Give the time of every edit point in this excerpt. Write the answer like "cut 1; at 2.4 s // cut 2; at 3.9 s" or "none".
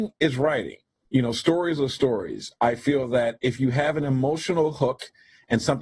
none